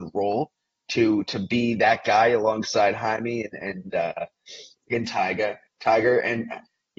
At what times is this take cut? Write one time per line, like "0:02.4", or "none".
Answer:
none